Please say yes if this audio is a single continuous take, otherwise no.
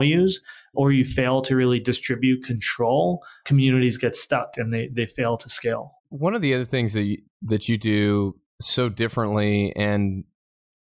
no